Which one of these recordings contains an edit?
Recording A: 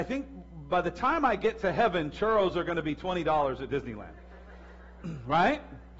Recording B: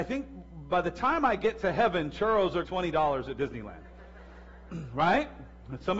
B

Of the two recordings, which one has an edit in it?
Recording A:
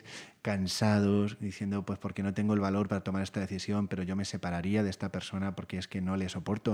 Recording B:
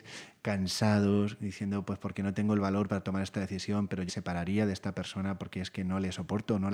B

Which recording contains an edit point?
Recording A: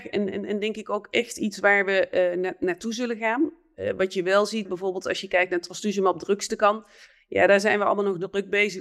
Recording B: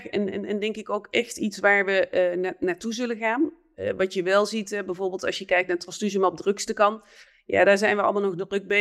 A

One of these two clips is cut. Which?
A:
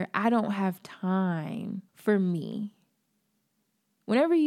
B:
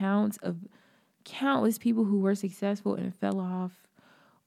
A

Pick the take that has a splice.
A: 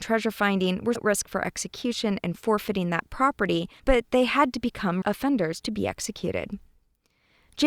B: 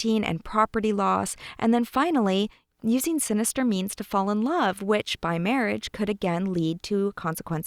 A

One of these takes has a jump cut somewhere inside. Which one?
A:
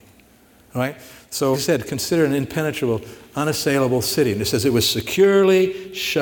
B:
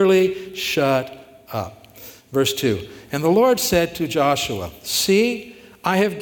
A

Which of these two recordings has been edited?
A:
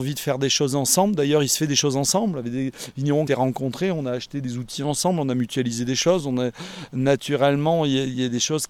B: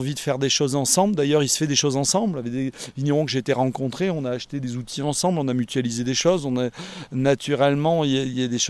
A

